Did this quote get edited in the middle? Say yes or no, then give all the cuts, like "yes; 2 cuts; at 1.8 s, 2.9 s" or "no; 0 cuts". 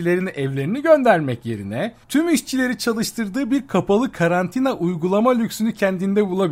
yes; 1 cut; at 2.0 s